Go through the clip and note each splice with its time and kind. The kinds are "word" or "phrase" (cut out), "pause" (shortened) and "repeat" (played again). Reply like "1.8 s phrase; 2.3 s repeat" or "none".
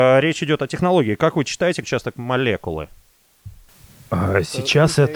1.8 s word